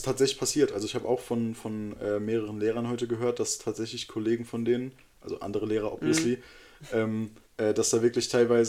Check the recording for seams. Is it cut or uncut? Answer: cut